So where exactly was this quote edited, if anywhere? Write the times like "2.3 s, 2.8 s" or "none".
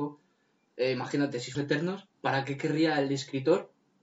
1.5 s, 2.1 s